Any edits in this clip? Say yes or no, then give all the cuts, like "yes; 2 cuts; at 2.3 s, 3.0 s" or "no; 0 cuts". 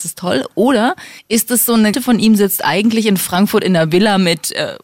yes; 2 cuts; at 1.2 s, 1.9 s